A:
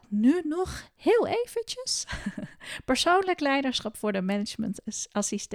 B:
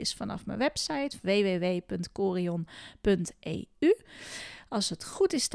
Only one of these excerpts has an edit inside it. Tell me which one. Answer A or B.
B